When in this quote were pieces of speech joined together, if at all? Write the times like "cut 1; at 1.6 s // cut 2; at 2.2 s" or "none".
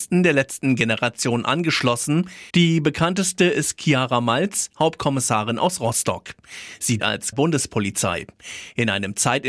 cut 1; at 2.5 s // cut 2; at 7.0 s // cut 3; at 7.3 s